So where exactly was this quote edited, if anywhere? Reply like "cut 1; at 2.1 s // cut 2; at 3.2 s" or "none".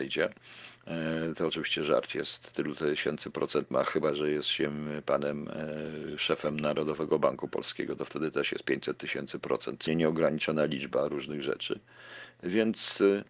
cut 1; at 3.7 s // cut 2; at 9.9 s